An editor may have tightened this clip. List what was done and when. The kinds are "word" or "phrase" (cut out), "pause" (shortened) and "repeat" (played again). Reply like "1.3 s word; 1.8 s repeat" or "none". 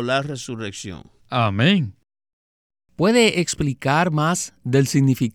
1.2 s pause